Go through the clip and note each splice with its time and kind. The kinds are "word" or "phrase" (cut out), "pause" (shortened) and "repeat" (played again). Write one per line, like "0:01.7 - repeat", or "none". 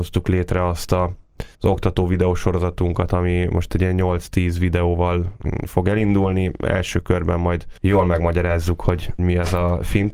0:01.5 - pause
0:07.8 - pause
0:09.2 - word